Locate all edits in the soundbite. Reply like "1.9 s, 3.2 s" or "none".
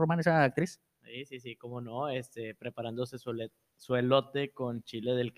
none